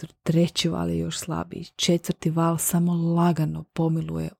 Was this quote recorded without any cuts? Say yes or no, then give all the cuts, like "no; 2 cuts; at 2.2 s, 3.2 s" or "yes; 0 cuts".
yes; 0 cuts